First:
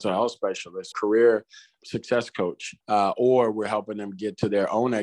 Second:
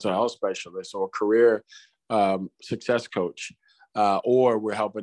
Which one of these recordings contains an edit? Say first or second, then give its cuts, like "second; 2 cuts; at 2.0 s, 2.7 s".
first; 3 cuts; at 0.9 s, 1.8 s, 2.8 s